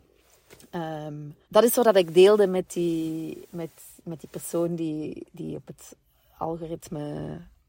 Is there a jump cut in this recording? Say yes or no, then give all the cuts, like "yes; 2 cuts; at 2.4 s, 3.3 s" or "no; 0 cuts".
yes; 1 cut; at 1.4 s